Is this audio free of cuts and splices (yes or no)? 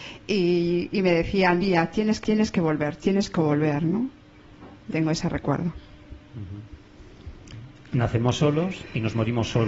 no